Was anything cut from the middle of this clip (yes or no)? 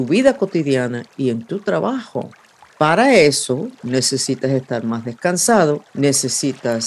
yes